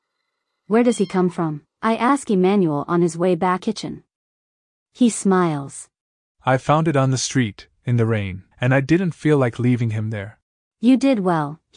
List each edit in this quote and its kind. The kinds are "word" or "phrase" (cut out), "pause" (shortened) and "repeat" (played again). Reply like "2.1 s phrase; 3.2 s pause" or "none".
3.6 s phrase; 8.5 s pause